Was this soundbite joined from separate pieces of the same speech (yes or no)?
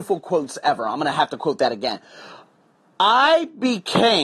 no